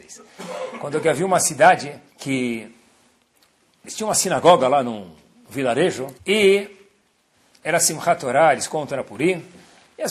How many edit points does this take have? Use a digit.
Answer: 2